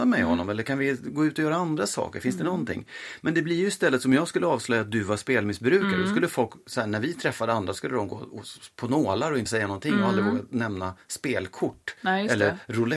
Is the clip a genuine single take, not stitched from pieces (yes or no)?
no